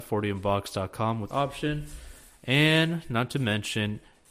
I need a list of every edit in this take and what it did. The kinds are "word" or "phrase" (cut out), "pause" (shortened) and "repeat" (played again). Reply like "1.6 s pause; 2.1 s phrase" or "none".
1.3 s phrase